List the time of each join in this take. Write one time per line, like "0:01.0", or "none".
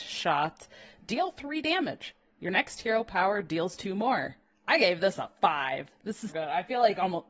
0:04.5
0:06.3